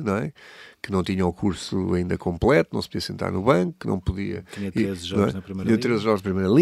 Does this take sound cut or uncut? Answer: uncut